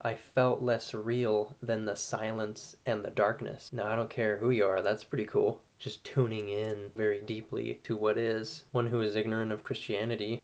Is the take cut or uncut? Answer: cut